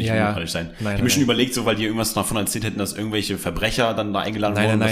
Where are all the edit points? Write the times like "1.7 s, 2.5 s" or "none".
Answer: none